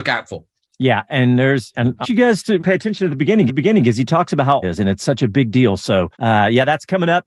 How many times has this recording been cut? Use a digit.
6